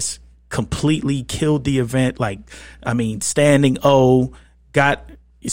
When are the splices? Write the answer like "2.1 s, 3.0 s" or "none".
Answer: none